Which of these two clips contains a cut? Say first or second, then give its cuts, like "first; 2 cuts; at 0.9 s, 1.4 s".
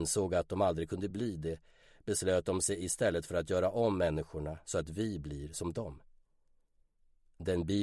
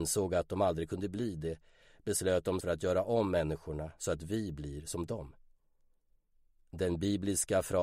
second; 1 cut; at 2.6 s